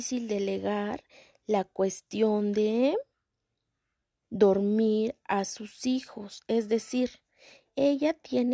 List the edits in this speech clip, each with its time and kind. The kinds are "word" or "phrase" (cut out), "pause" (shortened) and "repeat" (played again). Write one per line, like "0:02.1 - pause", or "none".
none